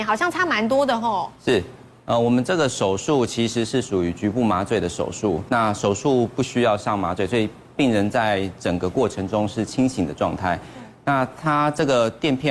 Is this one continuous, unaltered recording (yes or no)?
no